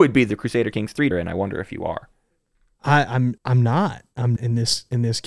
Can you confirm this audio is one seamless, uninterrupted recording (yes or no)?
no